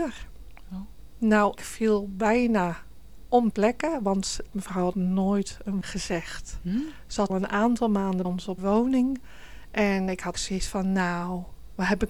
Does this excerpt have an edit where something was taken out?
yes; 9 cuts; at 1.5 s, 3.5 s, 4.5 s, 4.9 s, 5.8 s, 7.3 s, 8.2 s, 8.6 s, 10.3 s

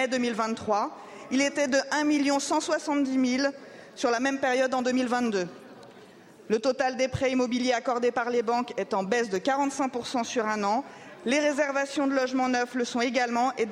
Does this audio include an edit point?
no; 0 cuts

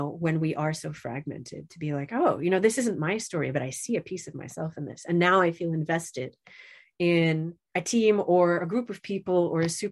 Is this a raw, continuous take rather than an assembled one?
yes; 0 cuts

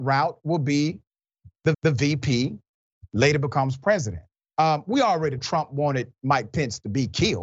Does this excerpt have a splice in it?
yes; 3 cuts; at 1.7 s, 4.4 s, 5.4 s

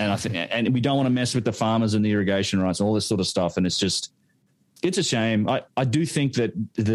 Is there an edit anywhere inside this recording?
no; 0 cuts

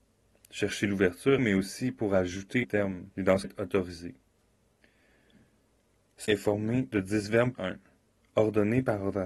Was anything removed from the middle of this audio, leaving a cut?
yes; 6 cuts; at 1.4 s, 2.6 s, 3.1 s, 3.4 s, 6.3 s, 7.5 s

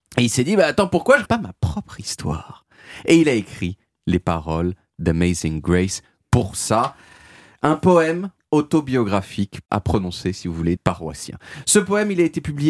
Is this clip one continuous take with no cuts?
no; 2 cuts; at 1.3 s, 10.8 s

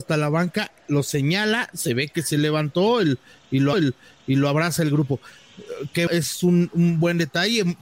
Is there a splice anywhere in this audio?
yes; 2 cuts; at 3.7 s, 6.1 s

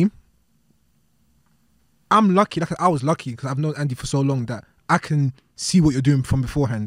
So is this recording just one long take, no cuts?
yes; 0 cuts

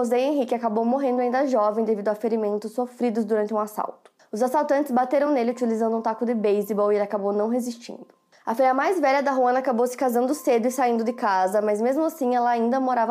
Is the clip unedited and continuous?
yes; 0 cuts

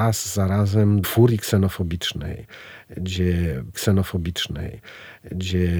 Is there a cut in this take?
yes; 2 cuts; at 1.0 s, 3.7 s

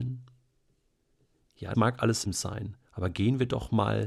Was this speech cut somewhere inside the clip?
yes; 3 cuts; at 1.7 s, 2.2 s, 2.8 s

